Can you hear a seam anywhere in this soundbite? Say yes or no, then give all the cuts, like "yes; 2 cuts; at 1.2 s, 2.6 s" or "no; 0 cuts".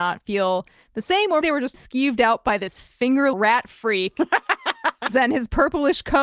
yes; 4 cuts; at 1.4 s, 1.7 s, 3.3 s, 5.1 s